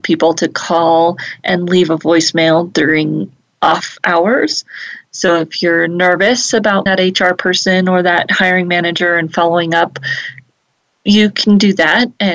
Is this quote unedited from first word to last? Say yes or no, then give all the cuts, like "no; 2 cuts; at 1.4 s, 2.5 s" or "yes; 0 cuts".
no; 1 cut; at 6.9 s